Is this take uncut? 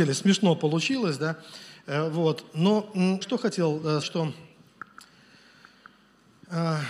no; 2 cuts; at 3.2 s, 4.0 s

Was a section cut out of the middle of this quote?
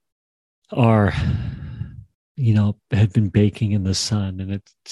yes; 1 cut; at 2.1 s

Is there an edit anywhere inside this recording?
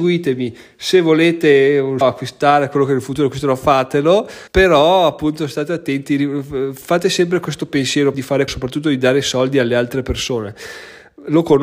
yes; 4 cuts; at 2.0 s, 4.5 s, 8.1 s, 8.5 s

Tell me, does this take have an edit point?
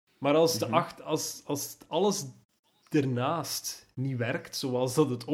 no; 0 cuts

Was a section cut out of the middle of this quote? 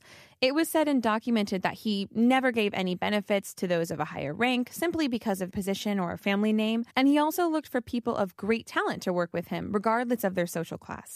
yes; 2 cuts; at 5.5 s, 6.9 s

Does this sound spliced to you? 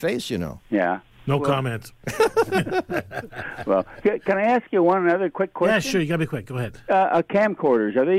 yes; 1 cut; at 1.1 s

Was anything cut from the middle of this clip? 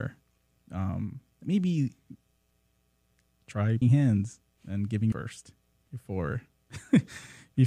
yes; 3 cuts; at 1.4 s, 3.8 s, 5.1 s

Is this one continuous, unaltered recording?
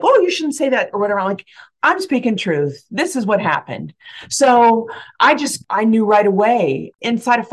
yes; 0 cuts

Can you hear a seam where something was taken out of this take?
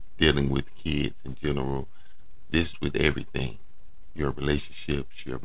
yes; 1 cut; at 2.7 s

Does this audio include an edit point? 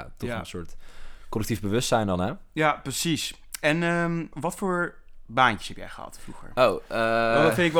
yes; 1 cut; at 4.3 s

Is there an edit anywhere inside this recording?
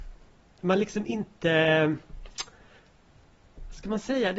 no; 0 cuts

